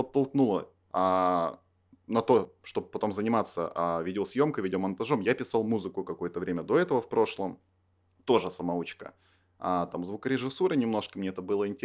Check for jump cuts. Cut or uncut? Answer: uncut